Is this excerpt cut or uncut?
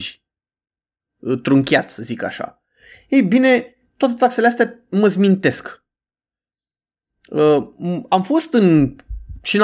uncut